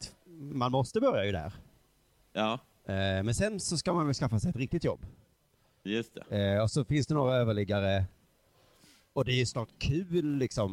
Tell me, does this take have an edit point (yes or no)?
no